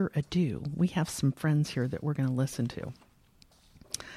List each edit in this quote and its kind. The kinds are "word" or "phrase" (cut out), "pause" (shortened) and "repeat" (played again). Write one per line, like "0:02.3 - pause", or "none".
none